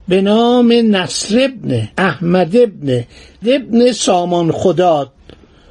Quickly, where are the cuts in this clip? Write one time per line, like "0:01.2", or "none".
0:01.9
0:03.4